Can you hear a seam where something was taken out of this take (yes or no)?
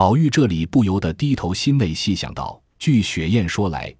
yes